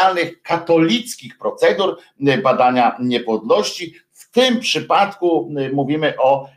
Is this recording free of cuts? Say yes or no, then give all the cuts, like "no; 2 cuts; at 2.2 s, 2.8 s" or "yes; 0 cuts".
yes; 0 cuts